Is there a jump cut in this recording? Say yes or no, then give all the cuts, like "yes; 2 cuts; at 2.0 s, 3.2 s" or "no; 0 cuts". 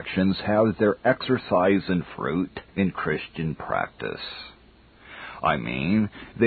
yes; 1 cut; at 2.7 s